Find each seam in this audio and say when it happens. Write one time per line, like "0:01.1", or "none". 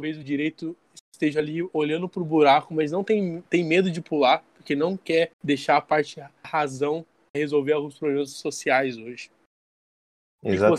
0:03.5
0:05.3
0:06.4
0:07.3